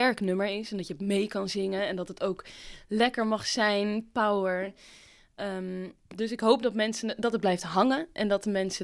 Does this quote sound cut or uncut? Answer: uncut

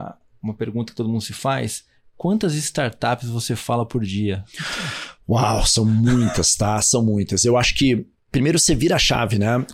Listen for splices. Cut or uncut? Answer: uncut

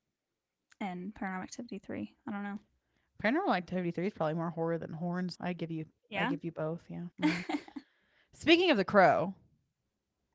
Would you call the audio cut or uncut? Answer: cut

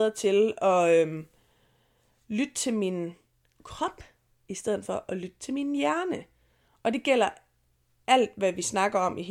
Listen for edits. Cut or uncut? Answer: uncut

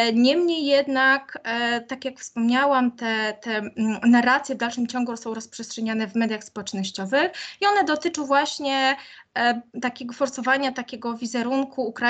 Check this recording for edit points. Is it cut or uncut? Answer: cut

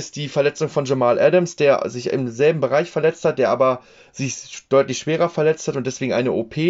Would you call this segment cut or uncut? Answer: uncut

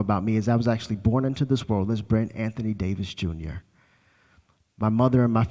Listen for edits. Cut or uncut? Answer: uncut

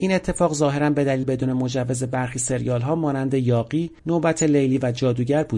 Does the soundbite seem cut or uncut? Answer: cut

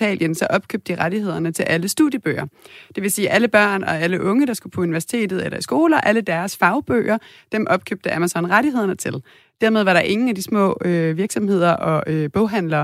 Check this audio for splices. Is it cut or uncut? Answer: uncut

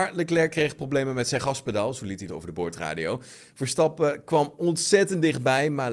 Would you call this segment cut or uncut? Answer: cut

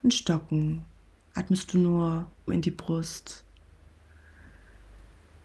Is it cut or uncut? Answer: cut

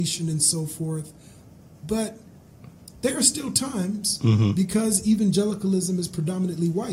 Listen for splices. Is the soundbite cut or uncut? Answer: uncut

